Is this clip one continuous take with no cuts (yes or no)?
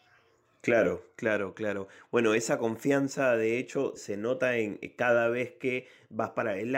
no